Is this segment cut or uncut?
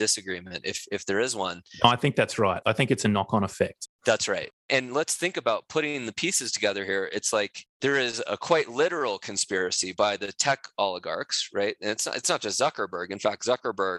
cut